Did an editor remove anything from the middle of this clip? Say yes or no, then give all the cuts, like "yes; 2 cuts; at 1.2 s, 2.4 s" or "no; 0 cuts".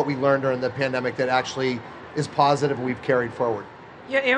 no; 0 cuts